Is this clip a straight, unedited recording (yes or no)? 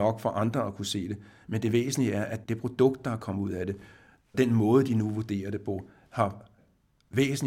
yes